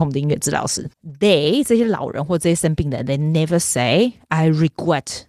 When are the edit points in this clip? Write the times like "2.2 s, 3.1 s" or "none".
0.9 s